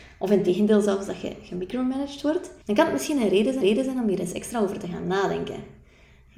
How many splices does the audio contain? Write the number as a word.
two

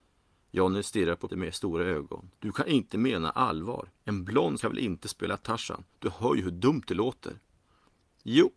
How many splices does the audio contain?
four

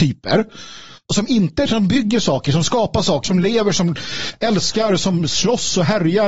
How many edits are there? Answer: two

